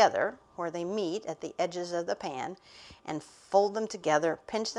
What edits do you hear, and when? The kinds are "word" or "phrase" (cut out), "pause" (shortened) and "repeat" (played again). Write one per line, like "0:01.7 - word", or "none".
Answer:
none